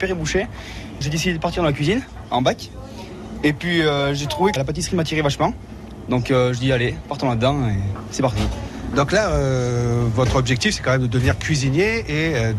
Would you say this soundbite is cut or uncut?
cut